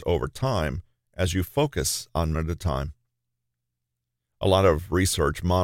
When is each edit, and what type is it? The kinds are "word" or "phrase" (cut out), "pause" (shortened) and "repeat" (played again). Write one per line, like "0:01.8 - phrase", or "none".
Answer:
0:02.3 - phrase